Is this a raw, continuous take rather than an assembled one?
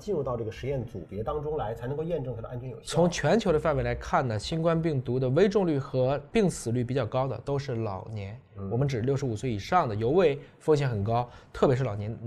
yes; 0 cuts

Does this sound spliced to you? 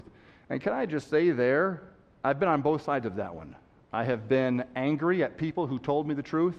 no; 0 cuts

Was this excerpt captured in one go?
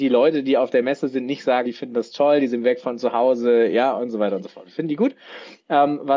no; 1 cut; at 1.7 s

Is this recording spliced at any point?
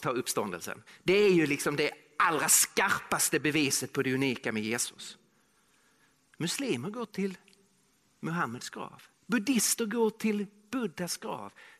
no; 0 cuts

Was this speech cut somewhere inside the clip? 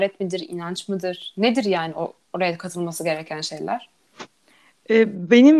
no; 0 cuts

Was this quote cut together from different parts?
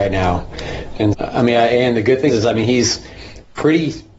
yes; 2 cuts; at 1.1 s, 2.3 s

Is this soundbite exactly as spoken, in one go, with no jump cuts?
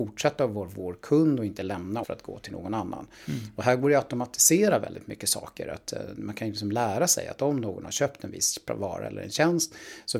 no; 1 cut; at 2.0 s

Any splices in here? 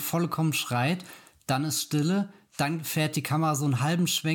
no; 0 cuts

